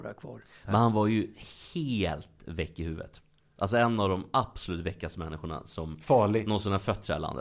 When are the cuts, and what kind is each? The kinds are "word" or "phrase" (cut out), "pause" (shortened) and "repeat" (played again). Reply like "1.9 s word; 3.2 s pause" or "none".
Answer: none